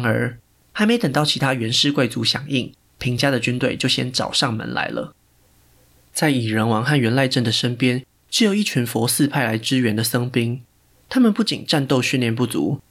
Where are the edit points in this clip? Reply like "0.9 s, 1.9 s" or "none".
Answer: none